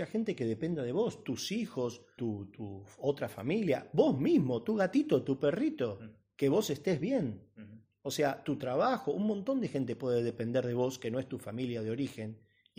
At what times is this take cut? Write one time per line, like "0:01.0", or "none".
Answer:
0:02.2